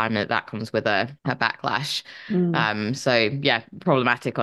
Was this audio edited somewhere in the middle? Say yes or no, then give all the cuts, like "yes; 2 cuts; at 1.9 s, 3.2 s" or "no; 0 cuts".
yes; 1 cut; at 1.2 s